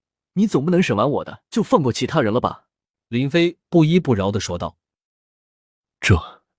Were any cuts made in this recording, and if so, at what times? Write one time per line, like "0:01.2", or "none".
0:01.5
0:02.9